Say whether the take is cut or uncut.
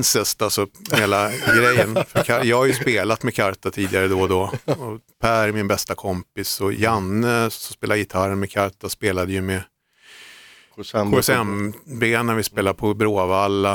uncut